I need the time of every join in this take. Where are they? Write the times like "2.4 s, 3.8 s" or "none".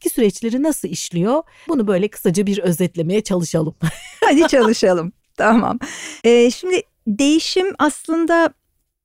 6.2 s